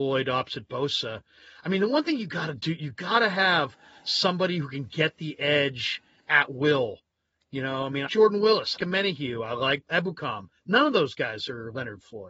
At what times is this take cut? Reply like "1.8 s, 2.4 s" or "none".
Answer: 8.1 s, 8.8 s, 9.9 s